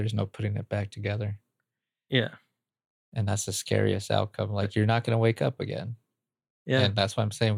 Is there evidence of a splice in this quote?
no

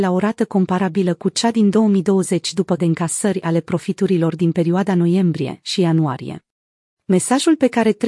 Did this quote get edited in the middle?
yes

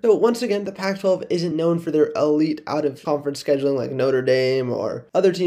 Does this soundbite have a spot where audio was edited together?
no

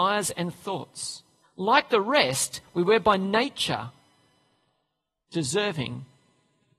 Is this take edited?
yes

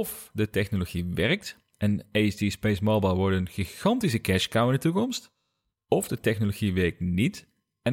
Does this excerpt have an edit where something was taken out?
no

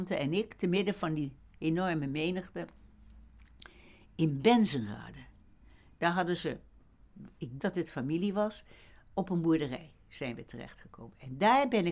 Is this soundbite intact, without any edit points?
no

